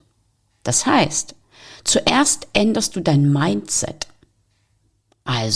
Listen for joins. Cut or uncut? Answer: uncut